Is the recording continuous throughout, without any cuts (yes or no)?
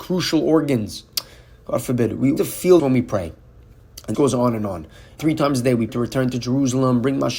no